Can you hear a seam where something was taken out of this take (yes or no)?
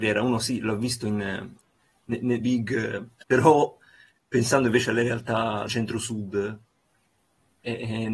yes